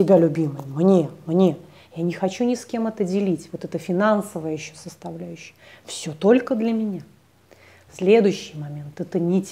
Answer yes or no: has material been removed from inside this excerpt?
no